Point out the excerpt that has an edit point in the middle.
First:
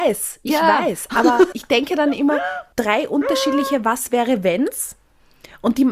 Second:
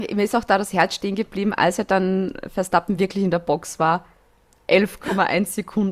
first; 1 cut; at 1.5 s

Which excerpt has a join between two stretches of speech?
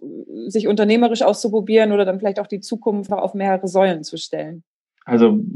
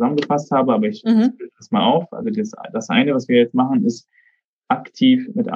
first; 1 cut; at 3.1 s

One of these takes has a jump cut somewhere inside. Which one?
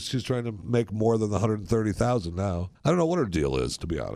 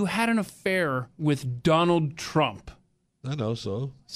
first; 1 cut; at 2.8 s

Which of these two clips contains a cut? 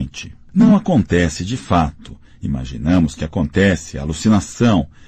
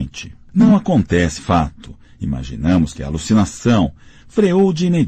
second; 2 cuts; at 1.4 s, 3.0 s

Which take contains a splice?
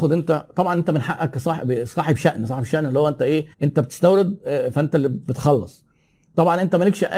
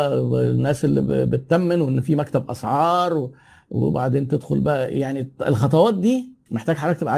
first; 1 cut; at 3.5 s

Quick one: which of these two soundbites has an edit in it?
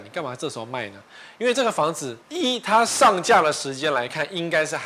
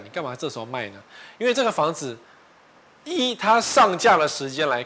first; 1 cut; at 2.2 s

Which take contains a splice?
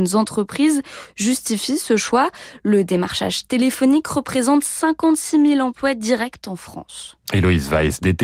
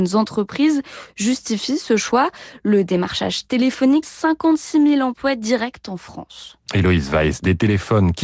second; 1 cut; at 4.0 s

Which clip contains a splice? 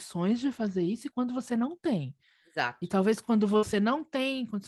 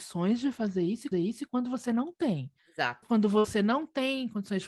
second; 3 cuts; at 1.1 s, 2.6 s, 3.0 s

